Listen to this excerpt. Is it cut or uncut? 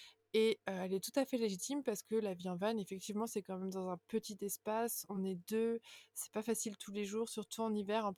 uncut